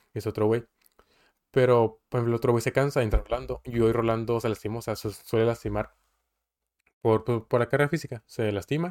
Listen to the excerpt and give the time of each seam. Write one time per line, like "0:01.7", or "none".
none